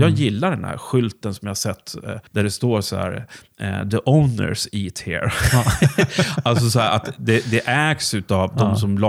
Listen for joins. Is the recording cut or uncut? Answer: cut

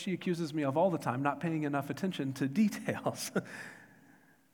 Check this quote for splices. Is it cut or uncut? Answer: uncut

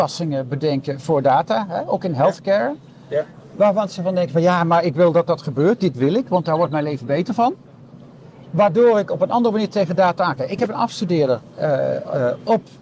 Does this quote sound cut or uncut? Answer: uncut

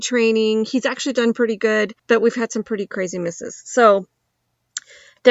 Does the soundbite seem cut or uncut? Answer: cut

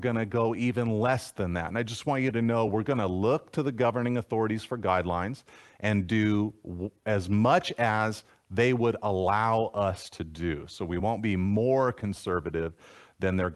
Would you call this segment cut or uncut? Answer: uncut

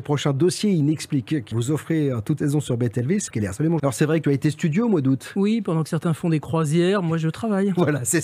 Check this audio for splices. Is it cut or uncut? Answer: cut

